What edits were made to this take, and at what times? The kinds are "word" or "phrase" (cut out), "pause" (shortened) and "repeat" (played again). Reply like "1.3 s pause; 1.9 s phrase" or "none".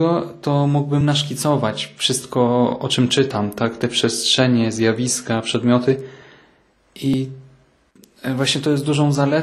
none